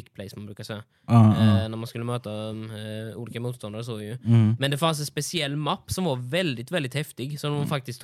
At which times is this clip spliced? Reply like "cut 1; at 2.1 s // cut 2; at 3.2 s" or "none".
none